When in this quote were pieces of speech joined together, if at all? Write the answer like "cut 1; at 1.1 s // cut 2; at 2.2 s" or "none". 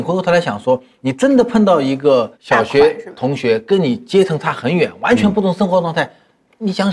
cut 1; at 2.3 s